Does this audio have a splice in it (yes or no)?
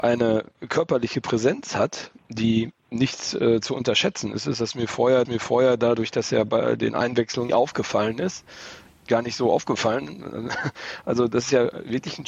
yes